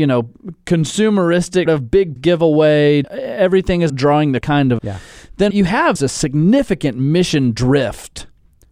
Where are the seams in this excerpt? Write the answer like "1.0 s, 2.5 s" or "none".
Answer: 1.7 s, 2.2 s, 3.0 s, 3.9 s, 4.4 s, 4.8 s, 5.5 s, 6.0 s